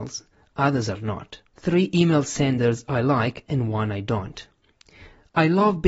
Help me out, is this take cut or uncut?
cut